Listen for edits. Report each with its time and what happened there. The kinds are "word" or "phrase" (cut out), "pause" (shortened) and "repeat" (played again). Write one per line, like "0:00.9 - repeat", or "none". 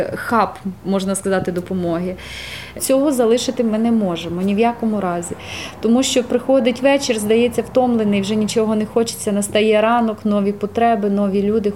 none